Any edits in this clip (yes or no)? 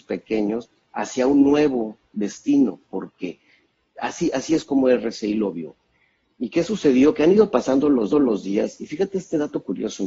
yes